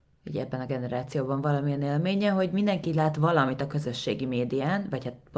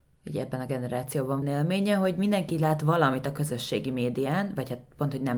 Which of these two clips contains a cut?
second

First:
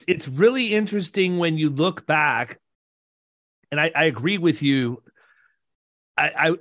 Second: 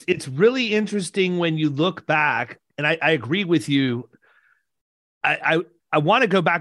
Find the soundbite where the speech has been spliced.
second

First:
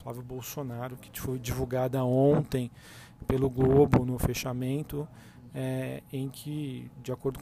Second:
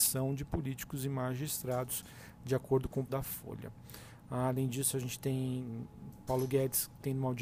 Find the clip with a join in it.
second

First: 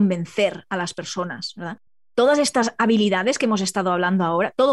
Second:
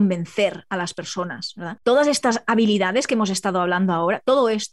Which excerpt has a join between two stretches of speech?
second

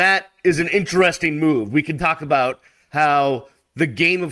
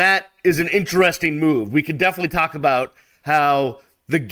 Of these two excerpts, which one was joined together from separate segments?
first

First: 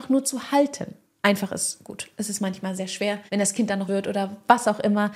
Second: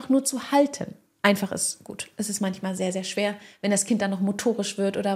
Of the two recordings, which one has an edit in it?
first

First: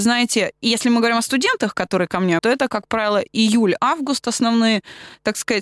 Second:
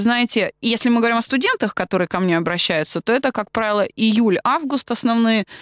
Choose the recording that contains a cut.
first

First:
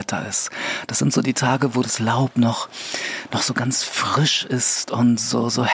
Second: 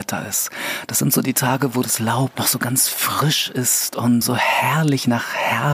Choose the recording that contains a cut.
second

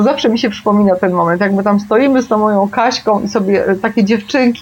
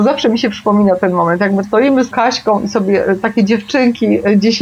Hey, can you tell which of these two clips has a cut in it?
second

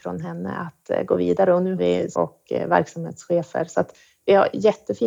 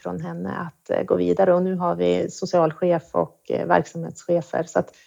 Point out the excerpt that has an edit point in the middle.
first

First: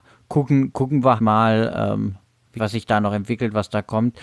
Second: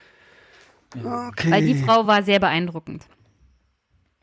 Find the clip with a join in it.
first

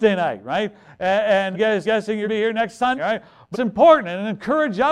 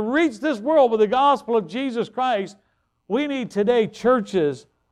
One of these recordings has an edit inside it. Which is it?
first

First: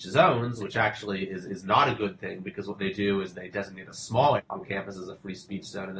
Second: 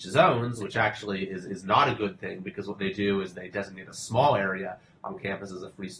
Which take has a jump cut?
first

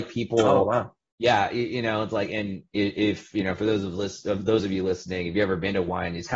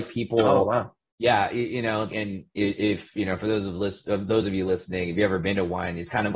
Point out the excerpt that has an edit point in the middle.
second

